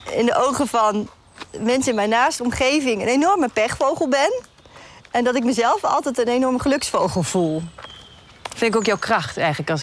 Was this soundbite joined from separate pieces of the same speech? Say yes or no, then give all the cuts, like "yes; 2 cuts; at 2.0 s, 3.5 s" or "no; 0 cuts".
no; 0 cuts